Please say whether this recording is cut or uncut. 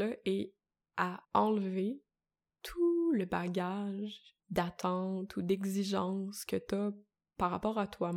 cut